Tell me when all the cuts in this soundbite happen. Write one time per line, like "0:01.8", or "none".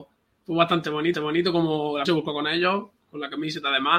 0:01.1
0:02.1